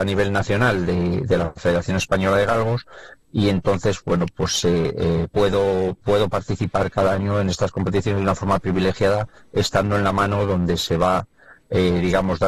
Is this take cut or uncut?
uncut